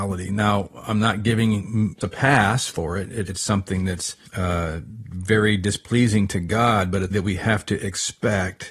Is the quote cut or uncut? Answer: cut